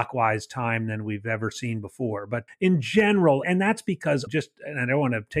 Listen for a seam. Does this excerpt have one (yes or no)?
yes